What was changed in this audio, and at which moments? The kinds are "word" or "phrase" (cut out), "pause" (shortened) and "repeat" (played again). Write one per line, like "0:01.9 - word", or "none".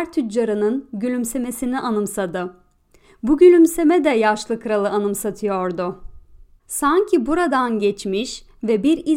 none